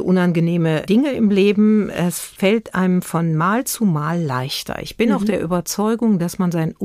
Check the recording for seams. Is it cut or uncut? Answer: uncut